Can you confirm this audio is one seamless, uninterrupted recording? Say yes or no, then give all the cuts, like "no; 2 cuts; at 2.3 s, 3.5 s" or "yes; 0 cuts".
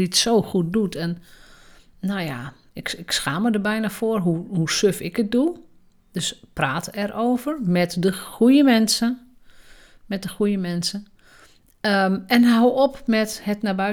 yes; 0 cuts